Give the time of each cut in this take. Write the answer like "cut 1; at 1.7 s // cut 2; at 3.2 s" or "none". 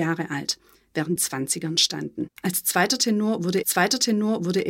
cut 1; at 1.2 s // cut 2; at 2.4 s // cut 3; at 3.6 s

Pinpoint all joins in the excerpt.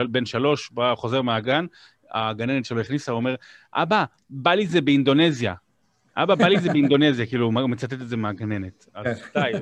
none

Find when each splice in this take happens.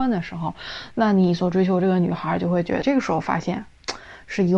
cut 1; at 2.8 s

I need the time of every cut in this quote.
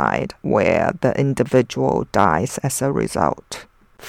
none

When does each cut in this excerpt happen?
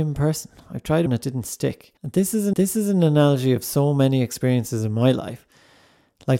cut 1; at 1.1 s // cut 2; at 2.0 s // cut 3; at 2.5 s

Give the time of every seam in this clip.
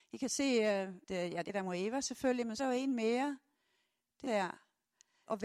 cut 1; at 1.0 s // cut 2; at 1.5 s // cut 3; at 2.6 s // cut 4; at 4.3 s

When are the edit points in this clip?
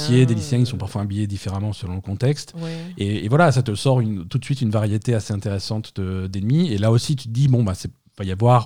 none

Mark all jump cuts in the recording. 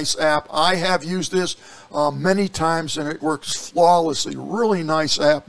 cut 1; at 3.2 s

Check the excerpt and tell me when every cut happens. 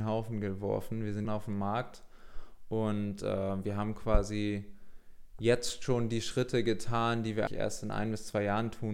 cut 1; at 1.2 s // cut 2; at 7.5 s

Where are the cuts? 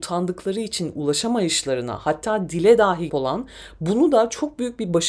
cut 1; at 3.1 s

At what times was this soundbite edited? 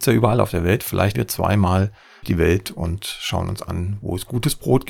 cut 1; at 1.1 s // cut 2; at 2.2 s

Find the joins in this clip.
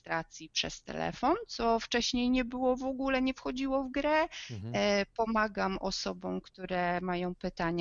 none

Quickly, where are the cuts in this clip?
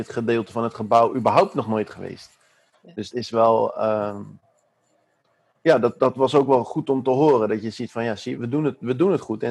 cut 1; at 3.1 s // cut 2; at 8.4 s

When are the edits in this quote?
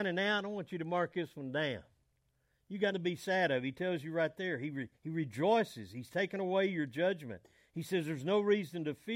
cut 1; at 2.9 s // cut 2; at 5.0 s

